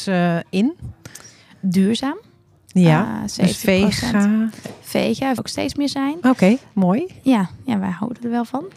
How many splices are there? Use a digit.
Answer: 1